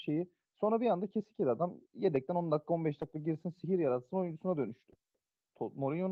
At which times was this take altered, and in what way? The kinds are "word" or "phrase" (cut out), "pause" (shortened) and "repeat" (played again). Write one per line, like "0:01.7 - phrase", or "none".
none